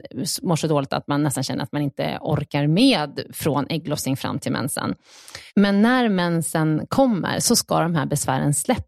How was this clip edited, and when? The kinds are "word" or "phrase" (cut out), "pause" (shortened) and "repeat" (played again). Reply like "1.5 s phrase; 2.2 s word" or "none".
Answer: 5.5 s pause